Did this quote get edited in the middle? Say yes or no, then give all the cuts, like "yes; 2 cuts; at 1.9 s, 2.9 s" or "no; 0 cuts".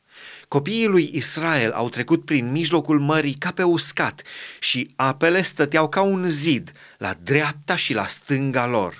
no; 0 cuts